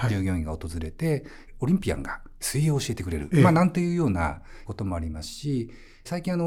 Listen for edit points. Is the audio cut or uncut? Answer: uncut